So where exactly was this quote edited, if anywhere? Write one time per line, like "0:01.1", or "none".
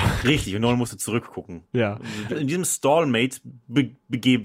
0:02.3